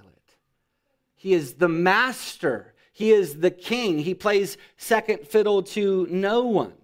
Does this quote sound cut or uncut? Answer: uncut